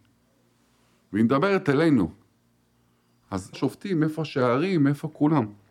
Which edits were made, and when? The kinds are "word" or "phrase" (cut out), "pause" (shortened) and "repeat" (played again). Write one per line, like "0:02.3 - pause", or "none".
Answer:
0:03.5 - word

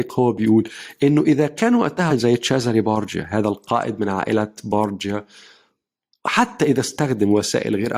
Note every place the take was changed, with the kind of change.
0:02.1 - word

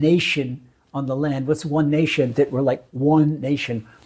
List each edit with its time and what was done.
none

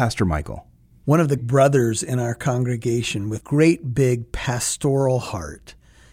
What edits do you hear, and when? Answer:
0:01.4 - word
0:03.4 - word

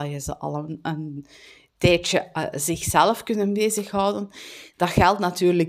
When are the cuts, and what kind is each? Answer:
none

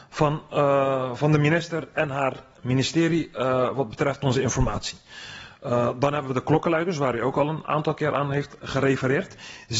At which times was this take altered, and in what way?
none

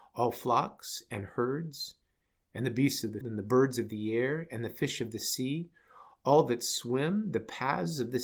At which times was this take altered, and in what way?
0:03.2 - word

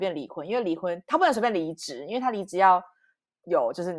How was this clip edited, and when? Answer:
none

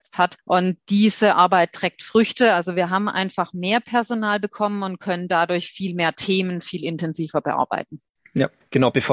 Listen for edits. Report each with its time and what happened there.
none

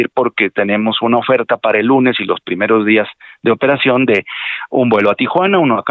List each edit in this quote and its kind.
none

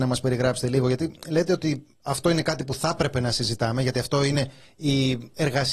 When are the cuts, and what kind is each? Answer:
none

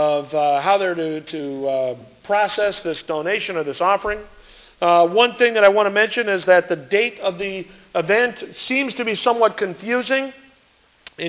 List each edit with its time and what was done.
none

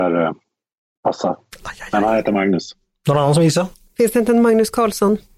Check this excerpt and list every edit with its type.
none

